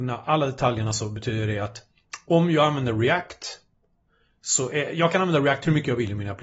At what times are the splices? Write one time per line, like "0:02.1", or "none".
none